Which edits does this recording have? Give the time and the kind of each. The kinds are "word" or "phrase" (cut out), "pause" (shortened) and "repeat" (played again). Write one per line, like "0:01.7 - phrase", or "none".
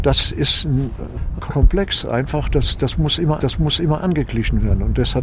0:01.4 - phrase
0:03.4 - repeat